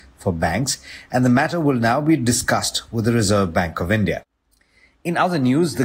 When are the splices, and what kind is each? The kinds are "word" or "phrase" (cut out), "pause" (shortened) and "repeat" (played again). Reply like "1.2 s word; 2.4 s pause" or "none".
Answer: none